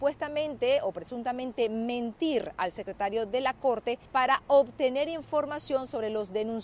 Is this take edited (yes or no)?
yes